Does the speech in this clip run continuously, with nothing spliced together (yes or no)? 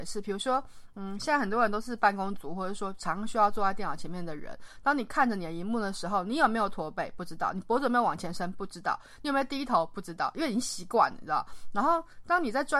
yes